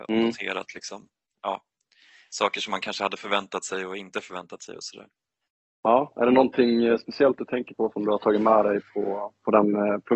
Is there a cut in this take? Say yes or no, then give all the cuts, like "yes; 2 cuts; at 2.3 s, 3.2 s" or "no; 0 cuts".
no; 0 cuts